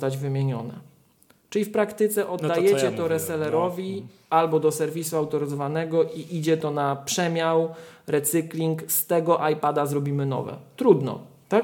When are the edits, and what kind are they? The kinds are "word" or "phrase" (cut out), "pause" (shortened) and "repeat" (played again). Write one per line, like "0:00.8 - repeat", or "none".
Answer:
none